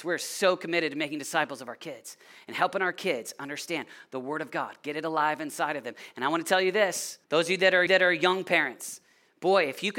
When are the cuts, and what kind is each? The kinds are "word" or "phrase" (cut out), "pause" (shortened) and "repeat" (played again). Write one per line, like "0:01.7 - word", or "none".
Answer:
0:07.2 - pause
0:07.9 - repeat